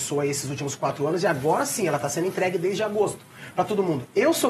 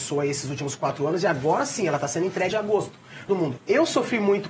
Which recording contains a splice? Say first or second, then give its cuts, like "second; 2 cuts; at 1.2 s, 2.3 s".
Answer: second; 2 cuts; at 2.5 s, 3.3 s